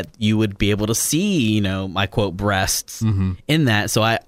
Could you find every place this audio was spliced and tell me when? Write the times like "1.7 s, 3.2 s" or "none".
none